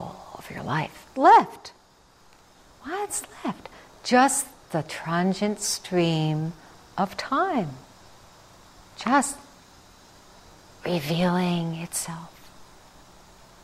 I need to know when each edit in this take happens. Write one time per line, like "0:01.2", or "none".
0:01.1

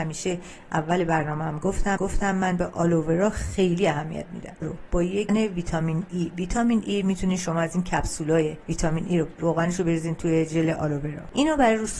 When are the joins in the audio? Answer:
0:02.0
0:04.6
0:05.3
0:09.4

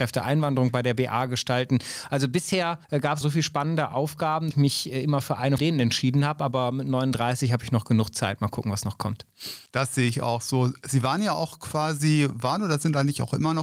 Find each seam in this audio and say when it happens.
0:03.2
0:04.5
0:05.6

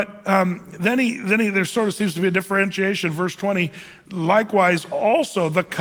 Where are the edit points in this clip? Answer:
none

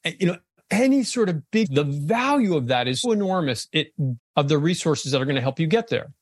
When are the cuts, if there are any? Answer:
0:01.6
0:03.0
0:04.2

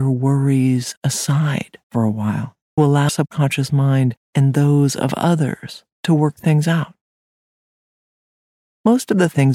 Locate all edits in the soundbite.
0:01.8
0:02.8
0:03.1
0:04.2
0:05.9

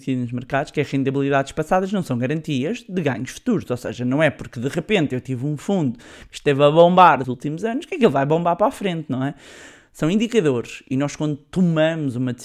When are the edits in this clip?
0:07.2

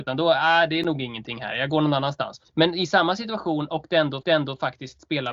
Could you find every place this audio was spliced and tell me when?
0:02.5
0:04.2

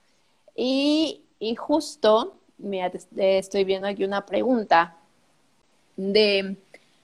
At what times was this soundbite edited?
none

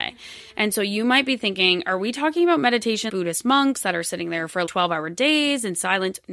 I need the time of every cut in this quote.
0:03.1
0:04.7

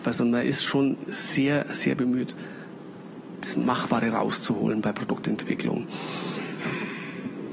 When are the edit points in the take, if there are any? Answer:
none

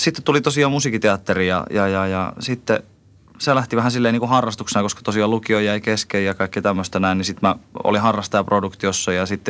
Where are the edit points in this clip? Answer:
none

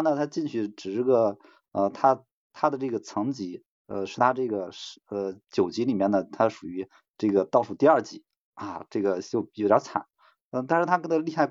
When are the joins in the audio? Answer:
none

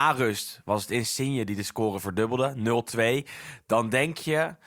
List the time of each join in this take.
none

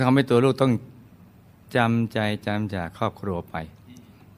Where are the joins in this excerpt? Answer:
none

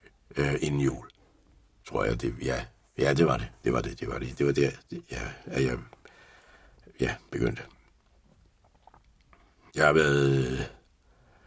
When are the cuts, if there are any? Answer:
none

